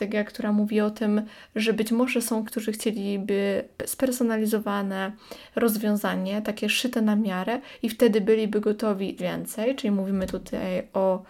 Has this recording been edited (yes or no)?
yes